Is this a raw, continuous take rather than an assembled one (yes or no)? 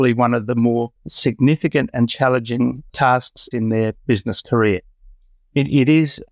no